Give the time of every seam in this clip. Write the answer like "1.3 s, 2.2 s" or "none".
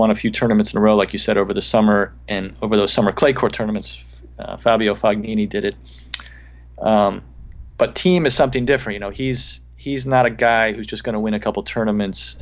none